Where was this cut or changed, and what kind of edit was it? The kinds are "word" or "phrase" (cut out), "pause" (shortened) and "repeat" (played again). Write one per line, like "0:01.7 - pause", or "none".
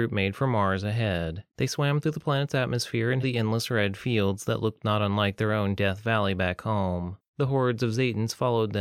0:01.5 - pause
0:03.2 - phrase
0:07.3 - pause